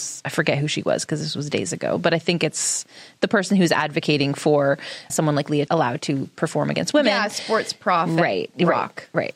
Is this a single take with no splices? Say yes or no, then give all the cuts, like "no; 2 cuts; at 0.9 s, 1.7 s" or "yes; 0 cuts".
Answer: no; 2 cuts; at 5.1 s, 5.7 s